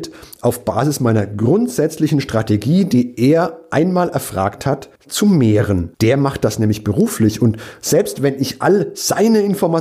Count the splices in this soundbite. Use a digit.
2